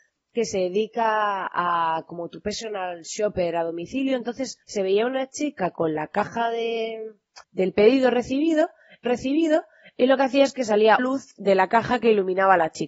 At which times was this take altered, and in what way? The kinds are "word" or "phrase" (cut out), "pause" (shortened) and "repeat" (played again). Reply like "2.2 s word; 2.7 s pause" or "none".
4.6 s pause; 7.4 s pause; 9.0 s repeat; 11.0 s word